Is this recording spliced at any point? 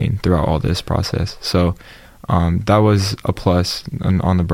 no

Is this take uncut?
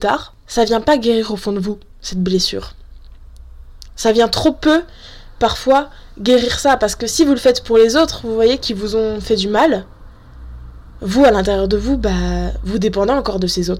yes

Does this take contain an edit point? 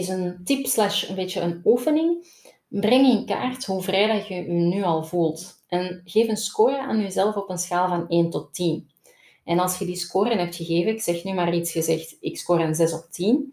no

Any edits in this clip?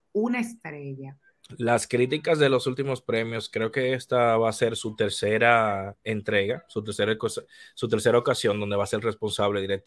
no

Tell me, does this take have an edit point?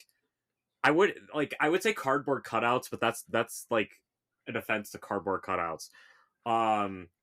no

